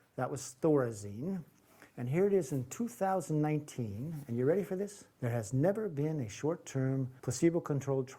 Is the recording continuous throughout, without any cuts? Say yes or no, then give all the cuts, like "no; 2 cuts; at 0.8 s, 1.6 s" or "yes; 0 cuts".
no; 3 cuts; at 1.9 s, 5.1 s, 7.2 s